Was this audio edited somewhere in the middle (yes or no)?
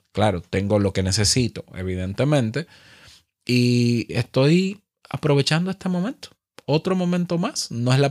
no